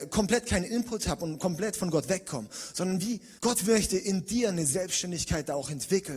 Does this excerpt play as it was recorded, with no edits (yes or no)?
no